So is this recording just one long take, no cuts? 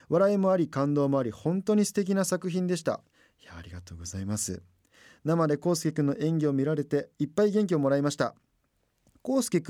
yes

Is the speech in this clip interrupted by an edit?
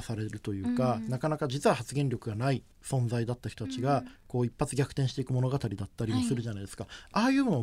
yes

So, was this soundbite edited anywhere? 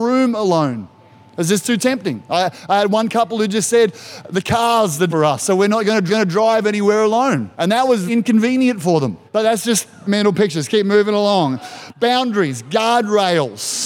yes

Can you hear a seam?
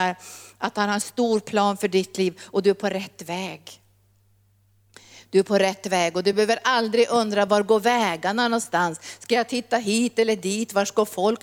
no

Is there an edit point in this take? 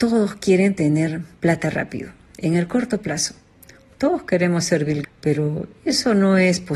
yes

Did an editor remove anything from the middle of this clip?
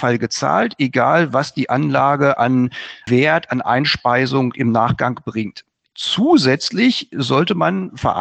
no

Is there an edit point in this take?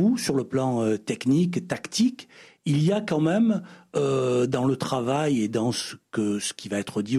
no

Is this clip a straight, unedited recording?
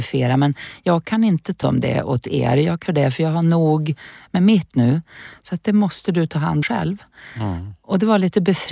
no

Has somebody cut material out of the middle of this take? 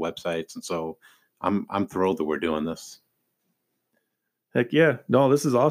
no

